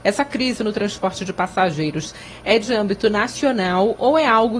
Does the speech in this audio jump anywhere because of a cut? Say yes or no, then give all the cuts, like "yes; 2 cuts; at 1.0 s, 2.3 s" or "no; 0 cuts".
no; 0 cuts